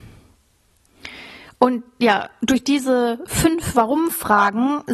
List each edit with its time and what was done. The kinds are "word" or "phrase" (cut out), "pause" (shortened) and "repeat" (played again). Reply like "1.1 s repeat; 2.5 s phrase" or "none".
none